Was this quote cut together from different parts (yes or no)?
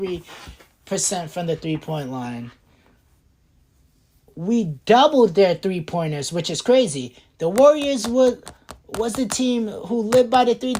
no